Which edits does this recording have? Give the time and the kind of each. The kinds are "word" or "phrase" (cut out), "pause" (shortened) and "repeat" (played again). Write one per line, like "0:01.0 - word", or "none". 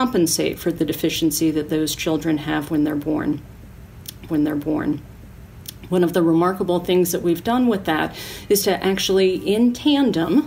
0:04.3 - repeat